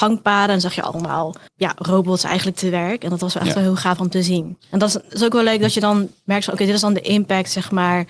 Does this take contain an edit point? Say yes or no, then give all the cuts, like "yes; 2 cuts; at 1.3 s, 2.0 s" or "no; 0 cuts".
yes; 2 cuts; at 1.5 s, 4.6 s